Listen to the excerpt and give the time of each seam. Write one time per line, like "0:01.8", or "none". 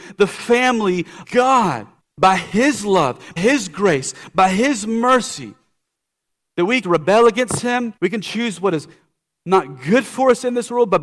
0:01.2
0:02.0
0:03.4
0:06.8
0:08.0

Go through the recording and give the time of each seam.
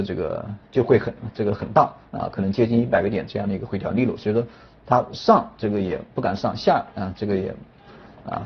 none

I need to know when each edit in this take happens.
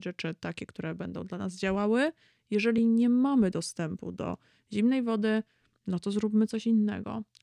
none

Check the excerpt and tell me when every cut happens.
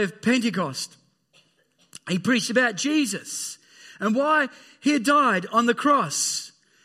none

